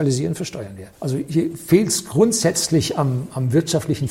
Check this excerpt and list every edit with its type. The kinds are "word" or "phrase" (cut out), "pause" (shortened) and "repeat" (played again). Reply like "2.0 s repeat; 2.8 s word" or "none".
0.9 s pause